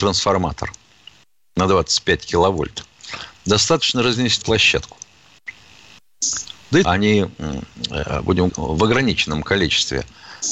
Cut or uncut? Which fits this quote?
cut